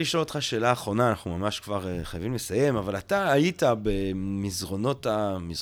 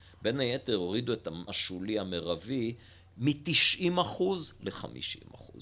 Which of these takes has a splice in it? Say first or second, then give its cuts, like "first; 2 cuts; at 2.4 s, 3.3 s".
second; 1 cut; at 1.5 s